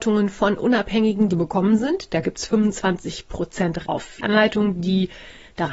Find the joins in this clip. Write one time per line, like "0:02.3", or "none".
0:01.3
0:03.8
0:04.2